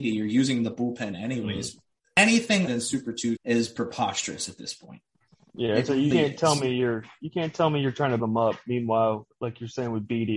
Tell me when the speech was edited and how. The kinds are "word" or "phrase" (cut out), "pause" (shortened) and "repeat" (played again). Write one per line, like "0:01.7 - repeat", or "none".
0:02.7 - word
0:03.4 - word
0:06.1 - word
0:08.2 - word